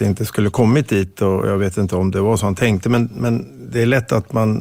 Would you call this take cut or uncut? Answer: uncut